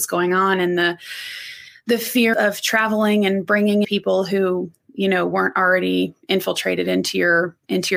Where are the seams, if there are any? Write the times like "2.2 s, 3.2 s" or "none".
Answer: 2.3 s, 3.8 s